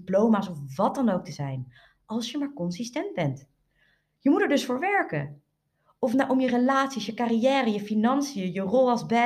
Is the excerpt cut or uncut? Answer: uncut